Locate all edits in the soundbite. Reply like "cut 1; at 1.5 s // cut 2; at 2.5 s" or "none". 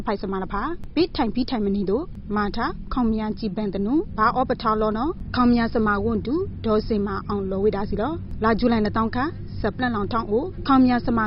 cut 1; at 9.6 s